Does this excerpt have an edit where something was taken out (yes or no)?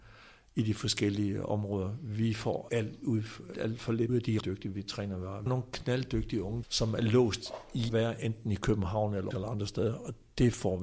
yes